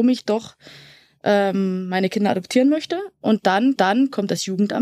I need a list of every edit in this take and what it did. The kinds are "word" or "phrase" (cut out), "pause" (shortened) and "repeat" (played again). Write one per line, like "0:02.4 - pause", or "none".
0:03.8 - repeat